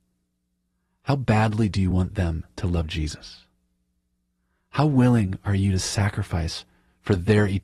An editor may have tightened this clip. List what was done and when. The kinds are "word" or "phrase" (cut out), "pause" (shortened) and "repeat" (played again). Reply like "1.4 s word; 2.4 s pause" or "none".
none